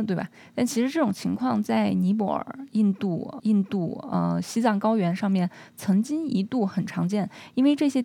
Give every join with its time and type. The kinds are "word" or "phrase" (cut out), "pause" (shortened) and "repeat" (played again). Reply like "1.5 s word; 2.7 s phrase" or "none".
3.4 s repeat

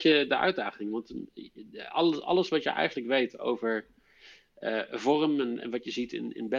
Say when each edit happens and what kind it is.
none

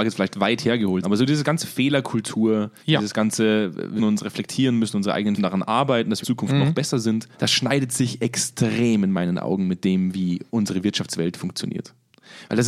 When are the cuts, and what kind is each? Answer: 1.0 s word; 2.8 s pause; 4.0 s word; 5.4 s phrase; 6.2 s phrase; 7.3 s pause; 10.5 s pause

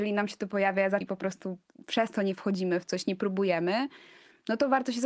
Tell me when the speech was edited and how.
1.0 s word

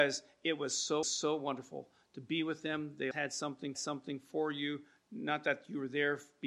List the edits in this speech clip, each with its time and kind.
1.0 s repeat; 3.1 s word; 3.7 s repeat

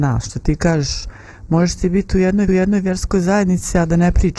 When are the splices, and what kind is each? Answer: 2.5 s repeat

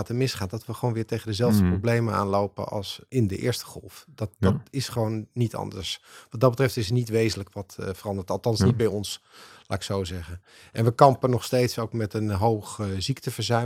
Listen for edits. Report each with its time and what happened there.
3.1 s pause

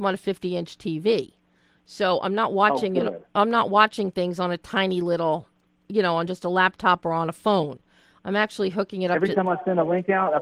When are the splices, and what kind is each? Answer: none

